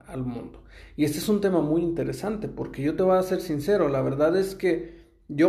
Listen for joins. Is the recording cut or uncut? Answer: uncut